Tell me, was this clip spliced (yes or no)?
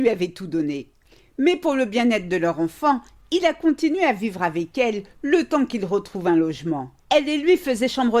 yes